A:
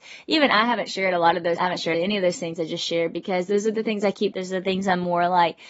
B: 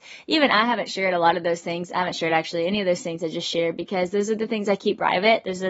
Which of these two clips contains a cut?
A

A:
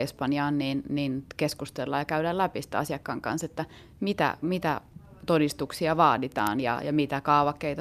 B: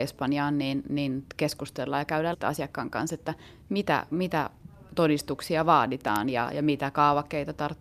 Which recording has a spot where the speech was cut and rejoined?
B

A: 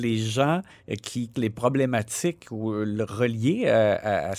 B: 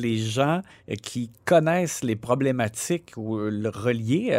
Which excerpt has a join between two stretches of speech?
A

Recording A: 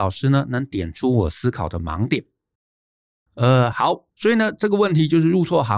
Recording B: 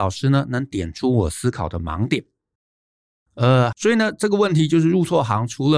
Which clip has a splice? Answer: B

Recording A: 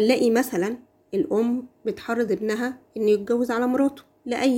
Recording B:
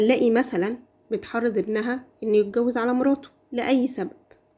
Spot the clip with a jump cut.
B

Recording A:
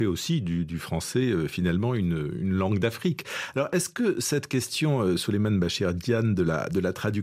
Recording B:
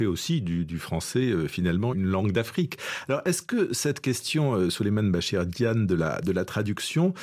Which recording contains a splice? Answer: B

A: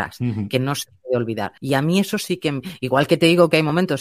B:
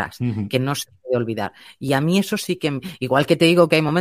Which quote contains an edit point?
A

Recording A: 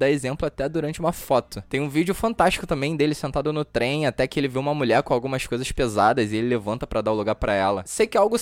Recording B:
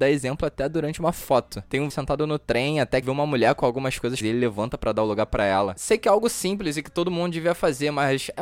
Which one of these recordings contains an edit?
B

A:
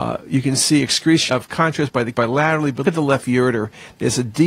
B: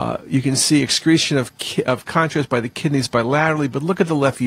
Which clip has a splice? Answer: A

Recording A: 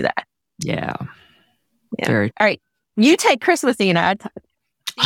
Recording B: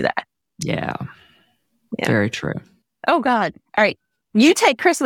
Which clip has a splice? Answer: A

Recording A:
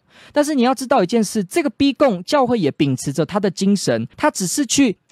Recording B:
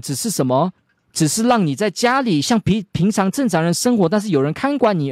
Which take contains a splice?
A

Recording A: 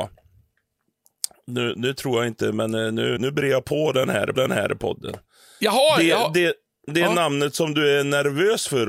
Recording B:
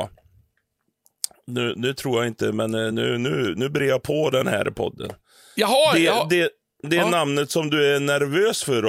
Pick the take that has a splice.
A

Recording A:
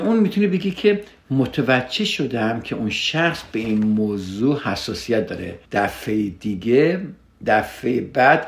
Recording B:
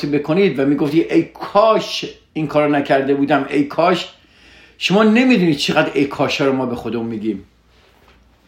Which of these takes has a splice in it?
A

